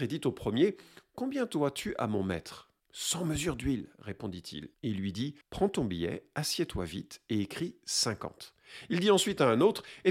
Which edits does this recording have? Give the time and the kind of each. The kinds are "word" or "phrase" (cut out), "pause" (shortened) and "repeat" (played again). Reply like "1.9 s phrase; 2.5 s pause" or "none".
2.8 s pause; 4.7 s pause; 5.4 s pause

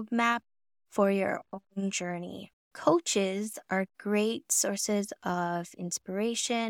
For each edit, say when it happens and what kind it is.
none

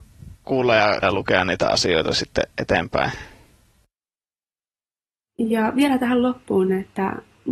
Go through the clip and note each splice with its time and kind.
1.0 s word; 2.5 s pause

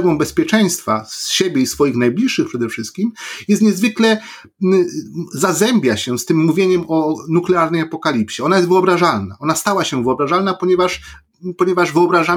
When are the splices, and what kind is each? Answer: none

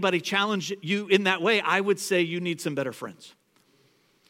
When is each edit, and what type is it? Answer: none

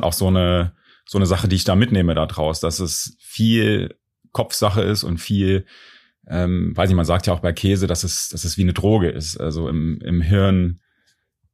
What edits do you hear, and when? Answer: none

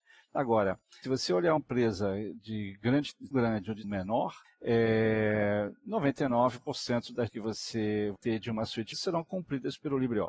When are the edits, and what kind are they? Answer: 1.0 s word; 1.6 s word; 3.3 s word; 3.8 s word; 4.4 s word; 7.3 s word; 8.2 s word; 8.9 s word

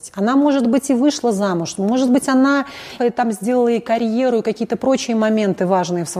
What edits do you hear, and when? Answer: 3.0 s word

